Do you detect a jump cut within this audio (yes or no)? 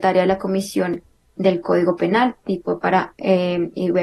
no